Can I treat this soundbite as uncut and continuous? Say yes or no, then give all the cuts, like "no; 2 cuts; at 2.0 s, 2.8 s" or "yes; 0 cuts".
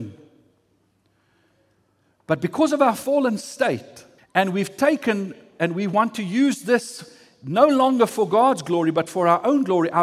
no; 1 cut; at 4.2 s